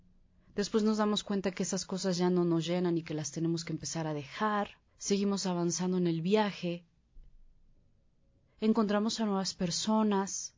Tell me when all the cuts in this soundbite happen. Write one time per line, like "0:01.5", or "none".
0:04.9